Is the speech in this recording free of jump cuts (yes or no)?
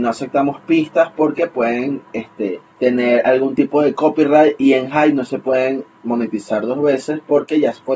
no